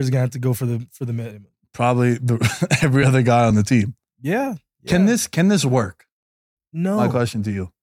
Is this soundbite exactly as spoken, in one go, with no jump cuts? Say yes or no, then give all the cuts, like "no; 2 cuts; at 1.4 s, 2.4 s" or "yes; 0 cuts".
yes; 0 cuts